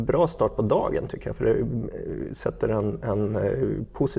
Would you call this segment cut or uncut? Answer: uncut